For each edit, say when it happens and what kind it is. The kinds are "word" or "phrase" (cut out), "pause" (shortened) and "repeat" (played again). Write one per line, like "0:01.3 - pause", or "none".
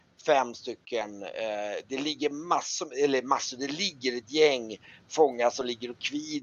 none

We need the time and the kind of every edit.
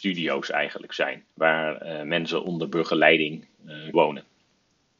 0:01.3 - pause
0:03.9 - word

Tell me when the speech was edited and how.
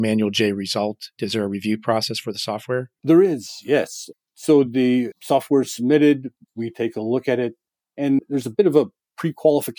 none

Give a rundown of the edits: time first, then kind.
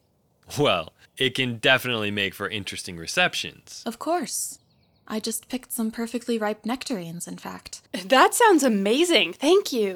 0:01.0 - pause

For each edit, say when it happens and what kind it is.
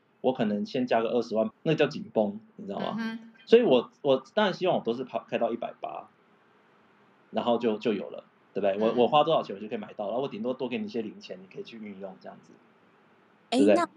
0:01.5 - word

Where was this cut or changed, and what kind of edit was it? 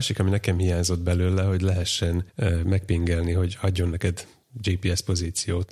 0:02.3 - pause

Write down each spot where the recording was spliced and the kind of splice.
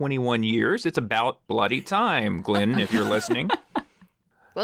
0:01.4 - pause

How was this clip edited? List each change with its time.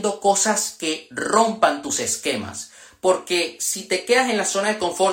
none

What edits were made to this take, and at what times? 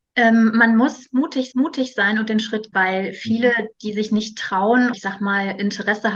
0:01.5 - repeat
0:02.7 - word
0:04.9 - word

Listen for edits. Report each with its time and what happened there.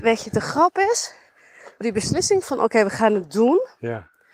0:01.8 - word
0:02.4 - word

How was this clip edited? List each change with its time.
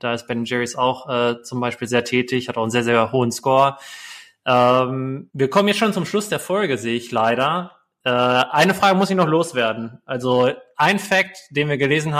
0:05.3 - pause

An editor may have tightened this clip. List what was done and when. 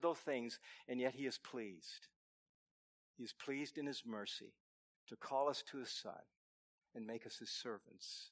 none

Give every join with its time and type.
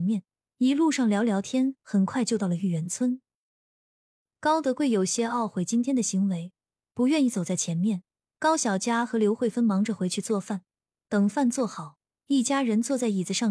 none

